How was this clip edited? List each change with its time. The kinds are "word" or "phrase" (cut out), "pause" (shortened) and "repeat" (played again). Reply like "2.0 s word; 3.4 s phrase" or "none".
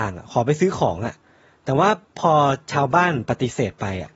none